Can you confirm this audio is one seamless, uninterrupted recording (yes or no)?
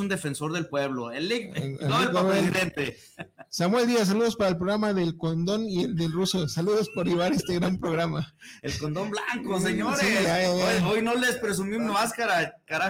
yes